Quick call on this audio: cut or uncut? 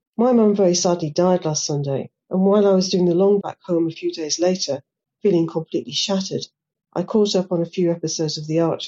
cut